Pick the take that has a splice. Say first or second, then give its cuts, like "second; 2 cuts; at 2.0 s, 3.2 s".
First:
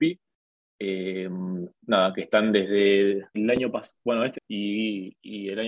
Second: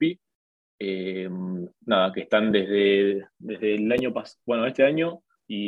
first; 2 cuts; at 3.3 s, 4.3 s